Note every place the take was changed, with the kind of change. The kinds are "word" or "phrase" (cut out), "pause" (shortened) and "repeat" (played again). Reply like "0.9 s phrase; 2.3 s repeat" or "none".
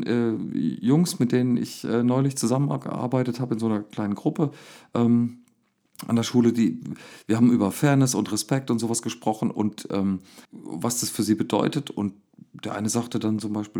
10.4 s pause